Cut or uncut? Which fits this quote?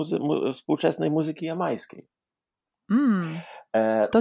uncut